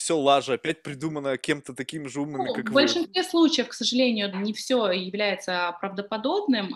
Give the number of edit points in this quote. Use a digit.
1